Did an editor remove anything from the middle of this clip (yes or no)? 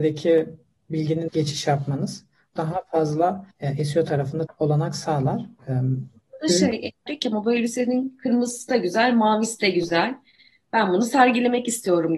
yes